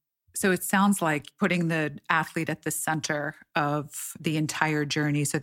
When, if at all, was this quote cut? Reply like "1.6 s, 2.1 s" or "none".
none